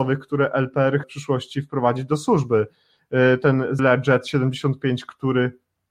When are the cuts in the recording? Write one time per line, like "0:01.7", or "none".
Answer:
0:01.0
0:03.8